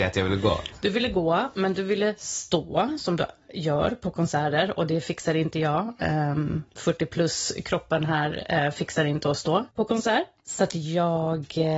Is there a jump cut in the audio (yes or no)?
no